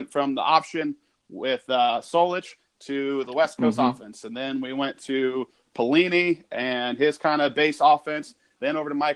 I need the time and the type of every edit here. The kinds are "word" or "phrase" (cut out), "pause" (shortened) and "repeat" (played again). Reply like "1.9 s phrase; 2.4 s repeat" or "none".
none